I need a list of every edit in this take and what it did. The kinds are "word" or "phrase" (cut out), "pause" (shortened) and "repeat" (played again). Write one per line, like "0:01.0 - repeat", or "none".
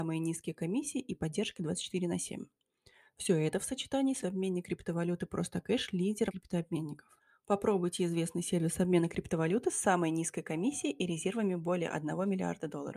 0:04.2 - phrase
0:06.3 - phrase
0:07.2 - pause